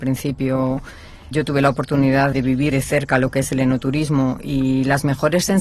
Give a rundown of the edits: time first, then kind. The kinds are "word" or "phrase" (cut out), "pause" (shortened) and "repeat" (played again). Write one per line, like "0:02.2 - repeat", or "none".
0:01.3 - word
0:02.3 - word
0:02.7 - word